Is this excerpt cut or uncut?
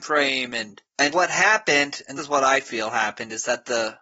cut